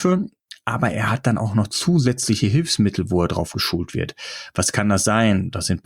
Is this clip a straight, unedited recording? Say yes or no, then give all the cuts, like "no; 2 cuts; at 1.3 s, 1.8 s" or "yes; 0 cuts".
yes; 0 cuts